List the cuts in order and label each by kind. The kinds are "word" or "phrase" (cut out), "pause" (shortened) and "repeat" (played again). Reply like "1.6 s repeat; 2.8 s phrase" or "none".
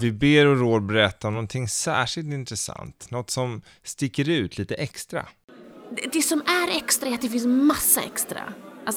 none